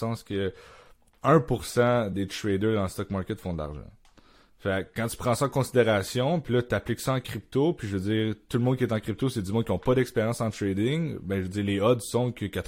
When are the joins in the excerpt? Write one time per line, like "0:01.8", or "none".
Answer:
none